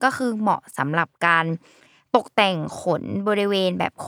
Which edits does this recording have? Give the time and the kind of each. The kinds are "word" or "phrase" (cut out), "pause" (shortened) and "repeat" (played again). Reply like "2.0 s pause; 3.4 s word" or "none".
none